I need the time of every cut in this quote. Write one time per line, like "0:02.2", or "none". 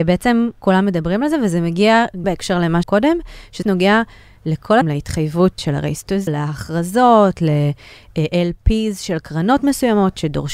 0:02.2
0:02.8
0:03.6
0:04.8
0:05.6
0:06.3